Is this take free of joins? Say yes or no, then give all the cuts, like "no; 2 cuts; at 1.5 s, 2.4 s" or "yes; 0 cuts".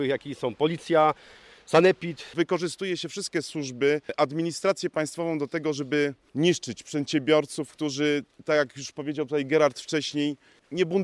yes; 0 cuts